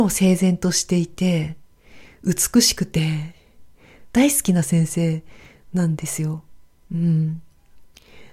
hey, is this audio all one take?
yes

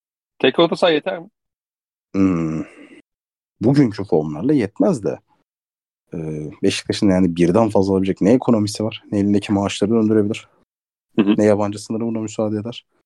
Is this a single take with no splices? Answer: yes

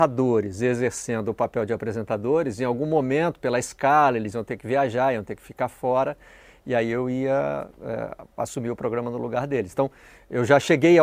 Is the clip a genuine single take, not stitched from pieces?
yes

